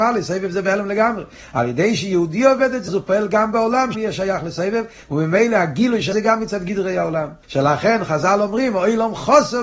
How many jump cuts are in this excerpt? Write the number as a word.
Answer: four